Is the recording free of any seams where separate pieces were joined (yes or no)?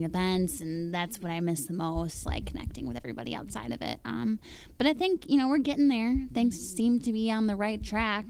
no